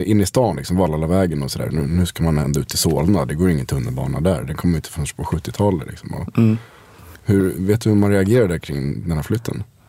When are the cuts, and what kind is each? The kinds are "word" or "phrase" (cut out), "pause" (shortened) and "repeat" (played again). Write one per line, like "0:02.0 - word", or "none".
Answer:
0:07.2 - pause